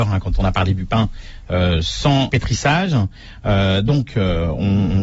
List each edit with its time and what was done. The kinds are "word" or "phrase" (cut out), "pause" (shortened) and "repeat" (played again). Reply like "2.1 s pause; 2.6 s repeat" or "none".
2.3 s word

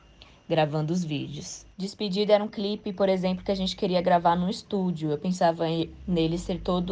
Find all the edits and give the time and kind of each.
1.7 s pause

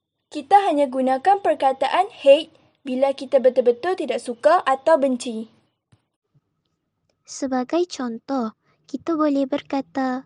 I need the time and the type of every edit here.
none

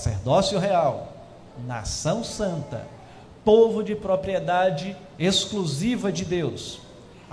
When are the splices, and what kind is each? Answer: none

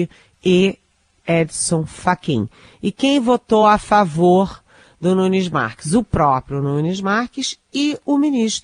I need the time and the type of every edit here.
none

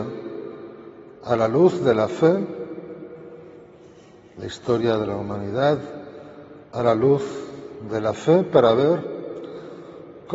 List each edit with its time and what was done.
1.2 s pause; 6.6 s pause

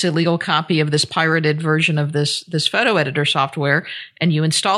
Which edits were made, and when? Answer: none

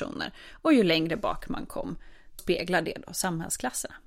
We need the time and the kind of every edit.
2.4 s word

